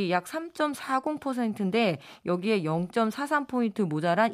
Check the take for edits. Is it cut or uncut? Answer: uncut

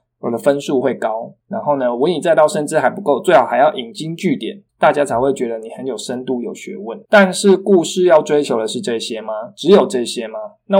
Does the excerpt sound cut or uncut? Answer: cut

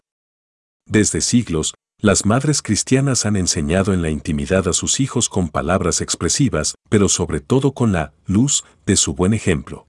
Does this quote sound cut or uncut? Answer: cut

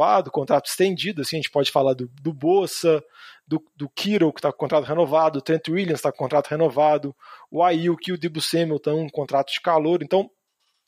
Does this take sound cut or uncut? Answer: uncut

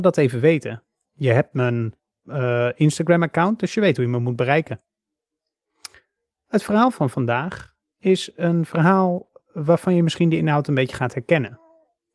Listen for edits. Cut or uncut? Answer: uncut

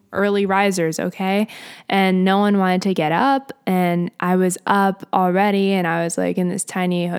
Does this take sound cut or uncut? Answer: uncut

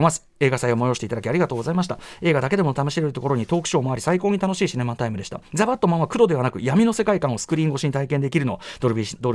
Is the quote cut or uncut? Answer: cut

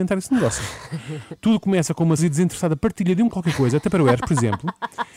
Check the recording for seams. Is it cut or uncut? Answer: cut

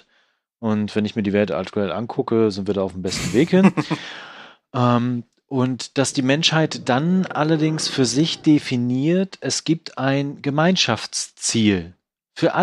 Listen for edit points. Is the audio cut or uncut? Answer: uncut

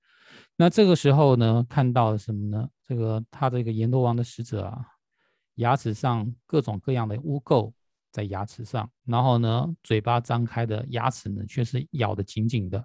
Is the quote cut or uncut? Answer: cut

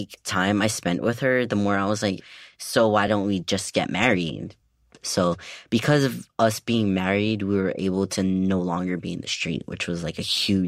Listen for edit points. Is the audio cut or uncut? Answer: uncut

